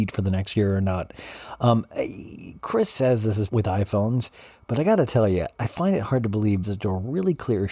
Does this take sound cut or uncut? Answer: cut